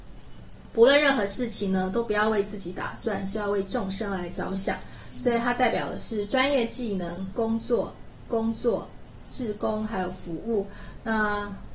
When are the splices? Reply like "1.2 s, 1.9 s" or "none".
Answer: 8.3 s